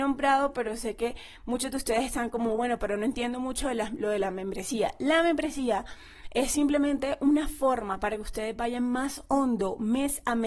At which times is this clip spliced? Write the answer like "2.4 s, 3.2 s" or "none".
none